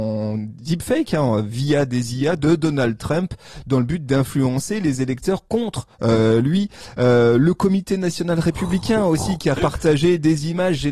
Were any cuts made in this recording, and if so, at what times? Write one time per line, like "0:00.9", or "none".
0:05.9
0:09.6